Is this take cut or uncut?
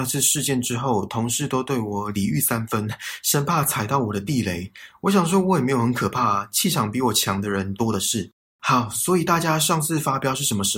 uncut